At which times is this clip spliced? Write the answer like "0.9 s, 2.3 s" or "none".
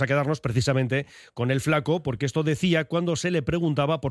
none